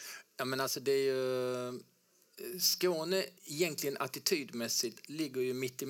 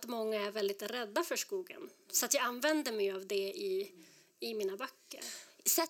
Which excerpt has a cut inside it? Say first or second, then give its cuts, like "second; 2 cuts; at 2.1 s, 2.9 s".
first; 1 cut; at 3.4 s